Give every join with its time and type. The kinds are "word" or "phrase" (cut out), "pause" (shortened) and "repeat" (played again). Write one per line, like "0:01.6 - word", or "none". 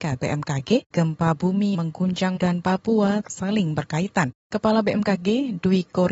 0:00.9 - word
0:01.7 - word
0:02.4 - word
0:03.2 - word